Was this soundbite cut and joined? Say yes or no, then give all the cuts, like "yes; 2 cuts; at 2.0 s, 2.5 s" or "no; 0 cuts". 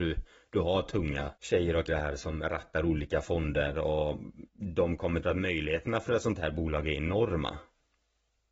yes; 4 cuts; at 1.4 s, 1.9 s, 4.5 s, 5.2 s